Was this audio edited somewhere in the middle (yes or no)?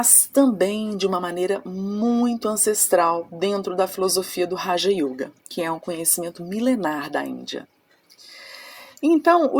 yes